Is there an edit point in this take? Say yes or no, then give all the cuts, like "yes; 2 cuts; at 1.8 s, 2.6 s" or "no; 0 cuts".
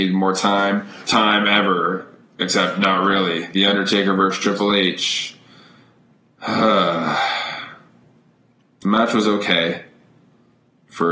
yes; 1 cut; at 1.1 s